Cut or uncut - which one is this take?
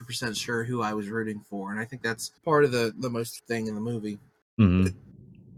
cut